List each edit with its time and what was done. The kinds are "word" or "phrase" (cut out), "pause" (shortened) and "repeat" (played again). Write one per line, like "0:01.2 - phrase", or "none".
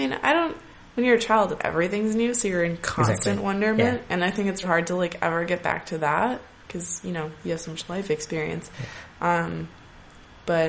0:01.6 - word
0:04.6 - word

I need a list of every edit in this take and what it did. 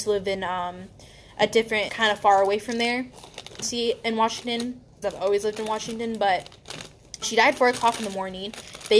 0:01.9 - word
0:03.6 - word
0:05.0 - word
0:07.2 - word

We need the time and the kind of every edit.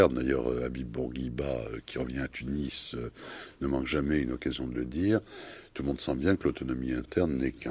none

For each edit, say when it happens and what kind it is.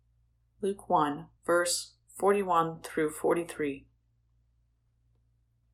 0:01.4 - pause

